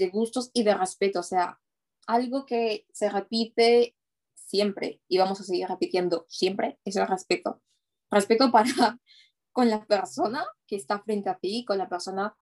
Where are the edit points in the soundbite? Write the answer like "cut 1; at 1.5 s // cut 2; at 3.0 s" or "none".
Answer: none

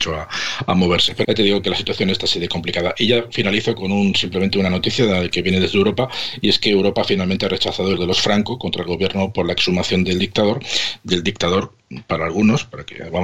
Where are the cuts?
cut 1; at 1.2 s // cut 2; at 8.0 s

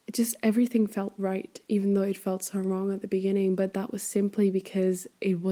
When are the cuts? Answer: none

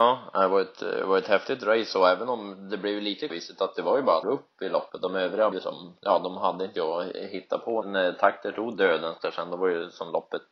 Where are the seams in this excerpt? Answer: cut 1; at 3.3 s // cut 2; at 4.2 s // cut 3; at 5.5 s // cut 4; at 6.8 s // cut 5; at 7.8 s

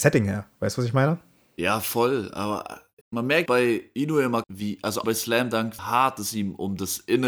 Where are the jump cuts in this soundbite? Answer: cut 1; at 3.0 s // cut 2; at 3.5 s // cut 3; at 4.4 s // cut 4; at 5.0 s // cut 5; at 5.8 s

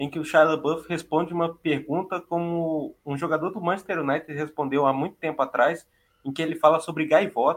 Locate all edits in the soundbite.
none

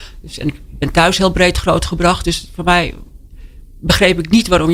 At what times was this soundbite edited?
none

